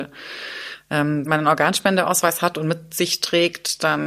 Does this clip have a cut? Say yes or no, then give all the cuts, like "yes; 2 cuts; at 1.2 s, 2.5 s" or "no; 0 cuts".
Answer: yes; 1 cut; at 1.3 s